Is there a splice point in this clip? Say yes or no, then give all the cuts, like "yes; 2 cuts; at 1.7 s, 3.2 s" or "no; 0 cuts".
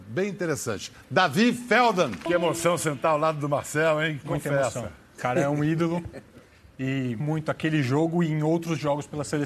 yes; 1 cut; at 7.2 s